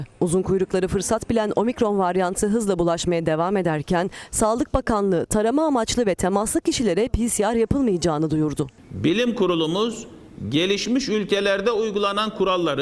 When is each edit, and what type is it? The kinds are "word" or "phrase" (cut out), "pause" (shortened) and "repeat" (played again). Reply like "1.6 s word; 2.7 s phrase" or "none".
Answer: none